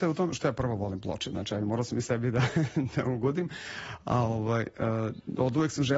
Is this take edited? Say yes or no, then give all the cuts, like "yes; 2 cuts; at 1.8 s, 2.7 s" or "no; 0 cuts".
no; 0 cuts